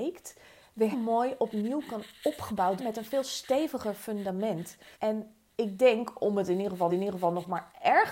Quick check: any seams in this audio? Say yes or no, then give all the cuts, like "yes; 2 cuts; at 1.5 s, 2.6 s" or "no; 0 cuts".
yes; 4 cuts; at 0.9 s, 2.8 s, 4.9 s, 6.9 s